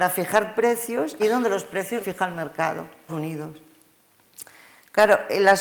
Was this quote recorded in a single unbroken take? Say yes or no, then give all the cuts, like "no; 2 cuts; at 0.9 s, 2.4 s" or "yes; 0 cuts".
no; 3 cuts; at 1.2 s, 2.0 s, 3.1 s